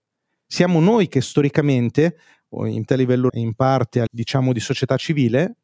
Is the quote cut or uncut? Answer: cut